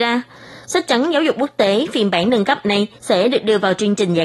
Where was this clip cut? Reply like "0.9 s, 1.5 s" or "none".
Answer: 3.0 s